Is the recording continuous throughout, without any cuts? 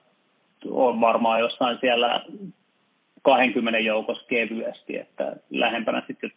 yes; 0 cuts

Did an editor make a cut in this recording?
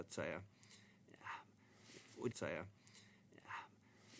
yes; 1 cut; at 2.3 s

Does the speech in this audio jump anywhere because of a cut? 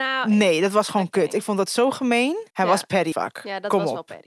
yes; 2 cuts; at 2.5 s, 3.1 s

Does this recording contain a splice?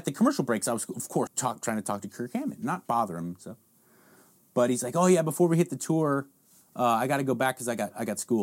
yes; 1 cut; at 1.3 s

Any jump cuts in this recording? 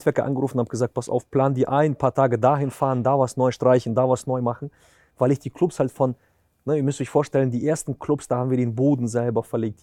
no; 0 cuts

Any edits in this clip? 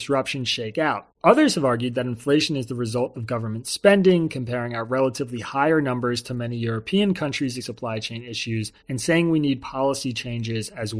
yes; 3 cuts; at 1.1 s, 7.6 s, 8.8 s

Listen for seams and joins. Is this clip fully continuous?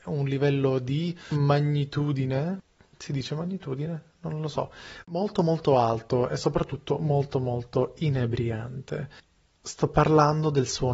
yes; 0 cuts

